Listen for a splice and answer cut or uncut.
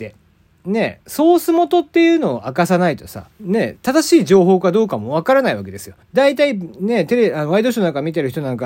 cut